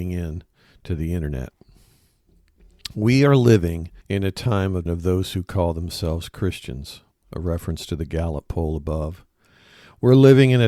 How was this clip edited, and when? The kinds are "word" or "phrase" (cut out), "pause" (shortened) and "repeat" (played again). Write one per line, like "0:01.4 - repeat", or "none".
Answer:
0:04.0 - pause
0:04.9 - word
0:07.1 - pause